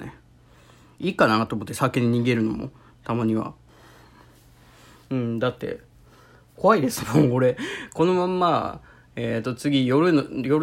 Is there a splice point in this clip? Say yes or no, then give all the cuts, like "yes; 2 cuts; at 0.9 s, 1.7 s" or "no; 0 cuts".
no; 0 cuts